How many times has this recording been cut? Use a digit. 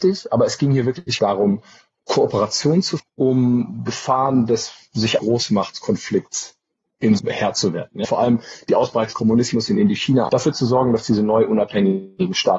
8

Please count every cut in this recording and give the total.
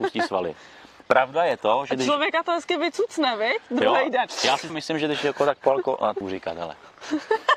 2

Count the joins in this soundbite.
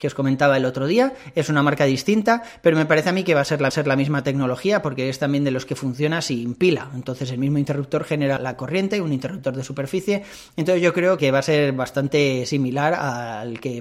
3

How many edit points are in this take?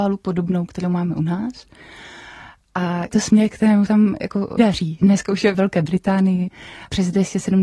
5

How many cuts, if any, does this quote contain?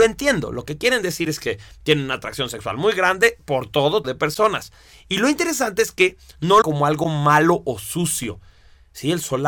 2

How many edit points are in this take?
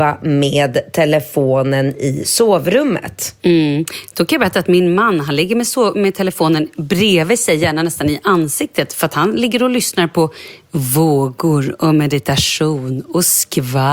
0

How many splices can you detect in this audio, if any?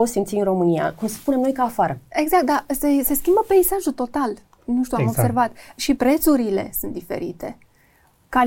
1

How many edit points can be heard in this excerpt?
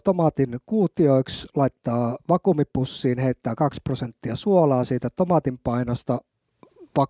0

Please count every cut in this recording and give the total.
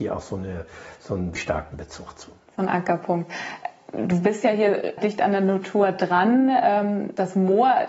2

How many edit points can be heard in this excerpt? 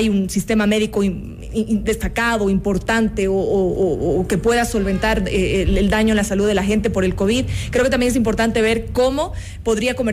0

